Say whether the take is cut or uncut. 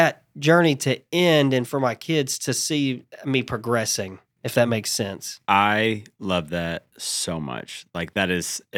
uncut